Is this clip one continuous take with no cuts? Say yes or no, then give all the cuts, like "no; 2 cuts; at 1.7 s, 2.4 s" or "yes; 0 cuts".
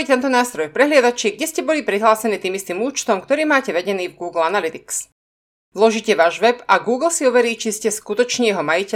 yes; 0 cuts